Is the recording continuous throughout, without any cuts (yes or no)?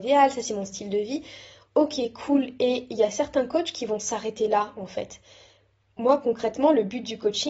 yes